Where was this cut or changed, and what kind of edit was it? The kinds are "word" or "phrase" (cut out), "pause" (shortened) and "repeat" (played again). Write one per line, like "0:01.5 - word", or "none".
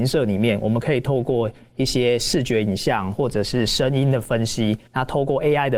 0:04.9 - pause

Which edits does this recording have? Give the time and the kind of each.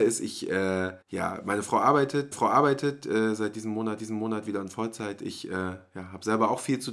0:01.0 - pause
0:02.3 - repeat
0:04.0 - repeat

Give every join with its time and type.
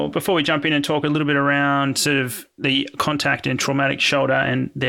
none

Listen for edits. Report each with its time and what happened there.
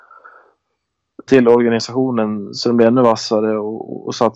0:01.3 - word

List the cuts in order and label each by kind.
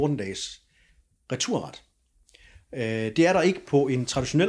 none

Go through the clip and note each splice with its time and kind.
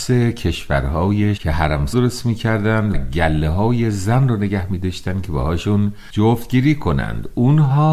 0:01.4 - word
0:01.9 - word
0:02.9 - word

